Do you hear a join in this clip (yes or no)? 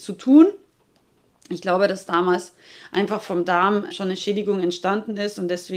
yes